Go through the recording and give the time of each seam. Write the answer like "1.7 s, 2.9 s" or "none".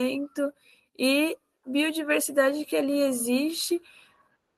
1.6 s